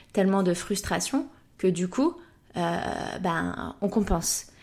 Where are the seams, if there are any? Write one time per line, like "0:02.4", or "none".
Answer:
none